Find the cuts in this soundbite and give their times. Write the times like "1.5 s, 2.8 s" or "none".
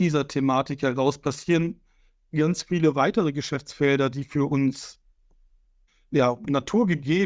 none